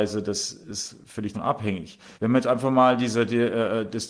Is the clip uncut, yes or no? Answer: no